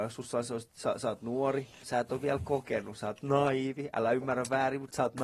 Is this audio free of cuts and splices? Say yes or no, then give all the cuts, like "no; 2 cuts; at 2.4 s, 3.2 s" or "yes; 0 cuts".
no; 1 cut; at 1.8 s